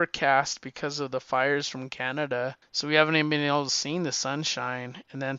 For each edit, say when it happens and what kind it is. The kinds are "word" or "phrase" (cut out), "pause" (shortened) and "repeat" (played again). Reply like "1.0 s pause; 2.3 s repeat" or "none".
2.6 s pause